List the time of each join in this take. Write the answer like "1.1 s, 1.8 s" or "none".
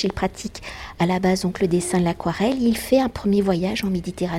none